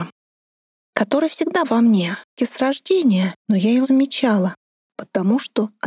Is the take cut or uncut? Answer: cut